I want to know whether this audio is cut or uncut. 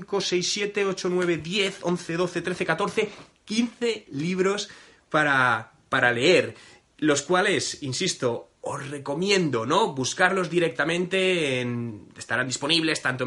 uncut